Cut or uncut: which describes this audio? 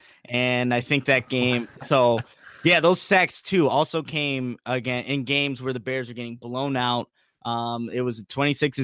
uncut